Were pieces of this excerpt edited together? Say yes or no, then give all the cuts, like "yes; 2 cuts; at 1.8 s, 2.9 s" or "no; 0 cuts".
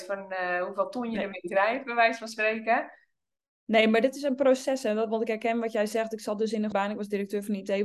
yes; 1 cut; at 6.7 s